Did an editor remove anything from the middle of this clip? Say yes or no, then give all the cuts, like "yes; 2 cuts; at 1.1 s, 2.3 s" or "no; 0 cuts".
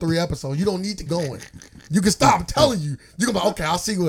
yes; 1 cut; at 1.1 s